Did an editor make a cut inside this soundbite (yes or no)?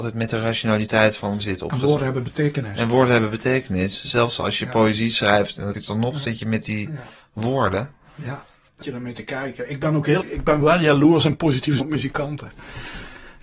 yes